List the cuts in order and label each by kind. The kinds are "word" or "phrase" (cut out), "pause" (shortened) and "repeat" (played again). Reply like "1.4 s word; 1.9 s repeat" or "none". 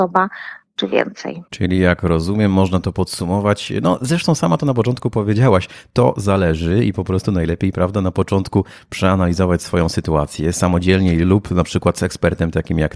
1.5 s pause

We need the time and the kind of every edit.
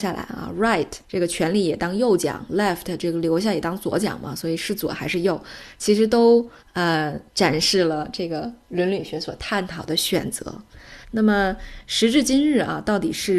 1.0 s pause; 6.6 s pause; 11.0 s pause

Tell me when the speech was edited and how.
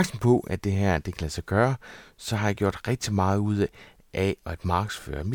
none

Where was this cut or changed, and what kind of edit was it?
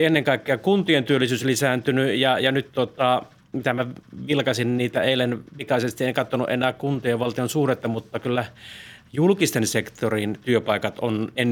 none

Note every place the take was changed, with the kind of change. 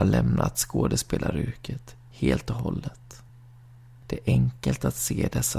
none

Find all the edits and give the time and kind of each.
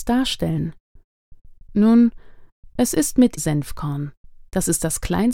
3.4 s phrase

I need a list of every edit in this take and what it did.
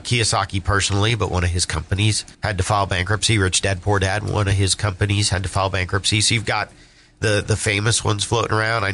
2.3 s pause; 6.4 s word

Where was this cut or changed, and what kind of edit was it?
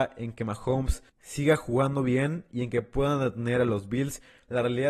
1.1 s pause

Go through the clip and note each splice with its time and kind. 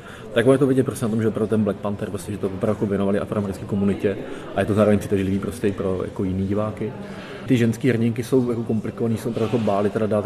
2.3 s phrase

